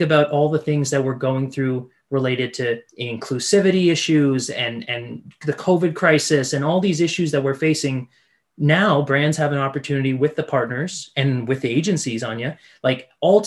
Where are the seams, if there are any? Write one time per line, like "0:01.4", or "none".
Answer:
0:02.9